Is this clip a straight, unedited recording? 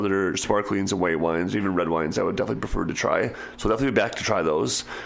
yes; 0 cuts

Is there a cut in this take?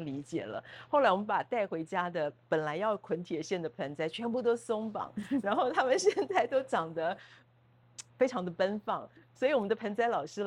yes; 1 cut; at 8.1 s

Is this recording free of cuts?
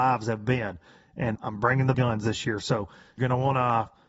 no; 3 cuts; at 1.4 s, 1.9 s, 3.2 s

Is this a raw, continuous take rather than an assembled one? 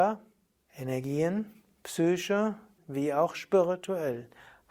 no; 1 cut; at 2.8 s

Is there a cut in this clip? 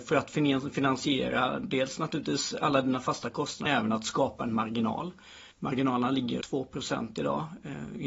yes; 3 cuts; at 3.7 s, 5.5 s, 6.4 s

